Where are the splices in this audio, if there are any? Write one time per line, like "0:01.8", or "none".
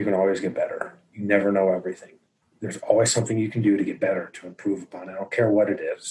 0:02.4